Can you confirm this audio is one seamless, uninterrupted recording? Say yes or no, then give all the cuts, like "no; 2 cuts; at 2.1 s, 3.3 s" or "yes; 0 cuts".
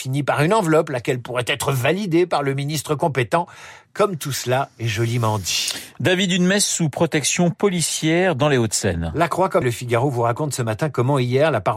no; 1 cut; at 9.6 s